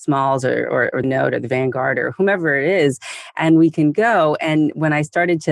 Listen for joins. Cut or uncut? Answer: cut